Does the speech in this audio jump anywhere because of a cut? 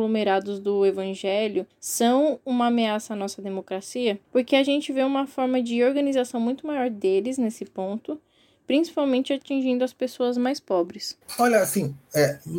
no; 0 cuts

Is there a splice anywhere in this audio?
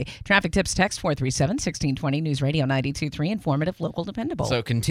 no; 0 cuts

